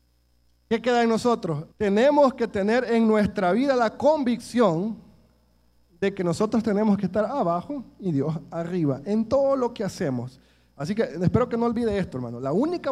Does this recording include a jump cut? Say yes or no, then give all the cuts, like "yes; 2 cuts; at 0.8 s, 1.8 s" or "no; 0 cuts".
yes; 1 cut; at 1.7 s